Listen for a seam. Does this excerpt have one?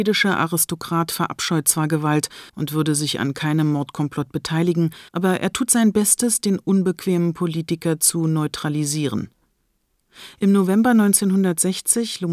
yes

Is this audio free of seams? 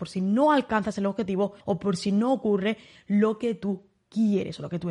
no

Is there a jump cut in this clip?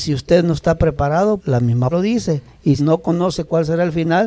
yes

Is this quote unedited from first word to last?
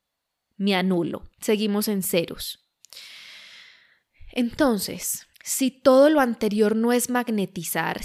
no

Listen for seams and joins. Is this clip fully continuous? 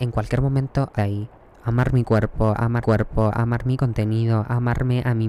no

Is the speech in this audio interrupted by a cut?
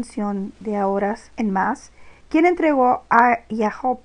yes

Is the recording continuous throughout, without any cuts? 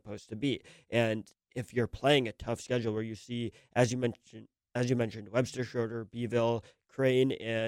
no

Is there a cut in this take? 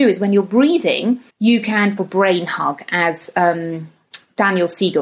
yes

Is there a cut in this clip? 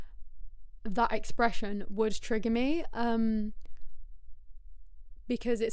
no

